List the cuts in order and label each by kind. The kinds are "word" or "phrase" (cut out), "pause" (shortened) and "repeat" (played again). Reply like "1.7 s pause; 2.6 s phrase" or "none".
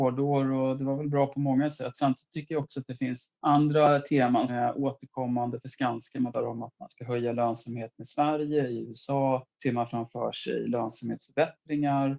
3.4 s pause; 4.5 s word; 6.3 s word; 9.5 s pause